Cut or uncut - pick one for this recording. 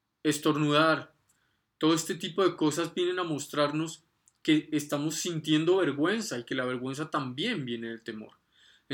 uncut